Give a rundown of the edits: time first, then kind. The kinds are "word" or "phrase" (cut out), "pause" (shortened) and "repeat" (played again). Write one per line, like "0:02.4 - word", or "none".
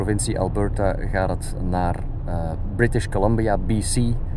none